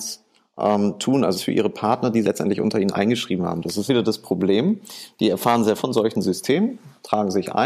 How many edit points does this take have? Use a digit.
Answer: 4